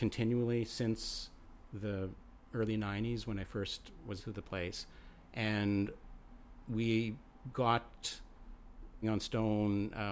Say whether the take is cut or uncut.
cut